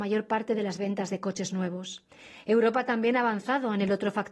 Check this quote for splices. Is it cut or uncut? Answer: uncut